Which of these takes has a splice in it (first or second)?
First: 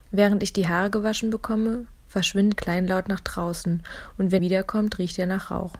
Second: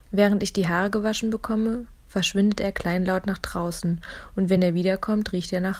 first